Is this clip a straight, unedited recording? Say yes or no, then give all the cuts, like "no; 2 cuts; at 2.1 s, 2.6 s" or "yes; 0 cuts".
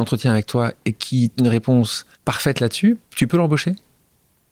no; 3 cuts; at 1.4 s, 2.1 s, 3.0 s